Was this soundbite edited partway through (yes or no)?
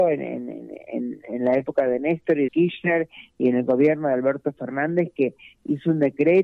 yes